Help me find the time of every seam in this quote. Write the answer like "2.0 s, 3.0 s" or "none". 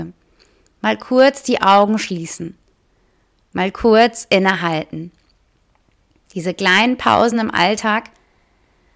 none